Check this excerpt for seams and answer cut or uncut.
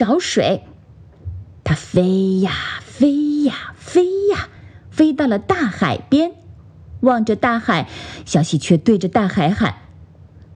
uncut